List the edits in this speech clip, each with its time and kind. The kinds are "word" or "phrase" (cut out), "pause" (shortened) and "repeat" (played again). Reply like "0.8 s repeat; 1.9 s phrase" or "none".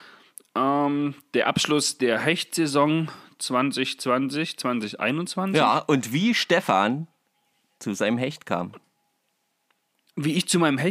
none